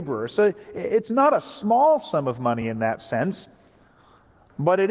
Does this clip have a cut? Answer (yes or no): no